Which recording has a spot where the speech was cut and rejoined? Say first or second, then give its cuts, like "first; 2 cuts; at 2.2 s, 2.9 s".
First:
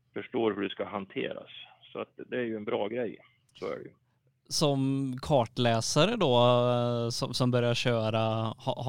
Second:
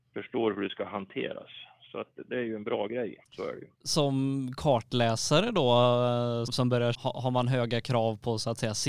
second; 4 cuts; at 3.2 s, 3.7 s, 6.5 s, 6.9 s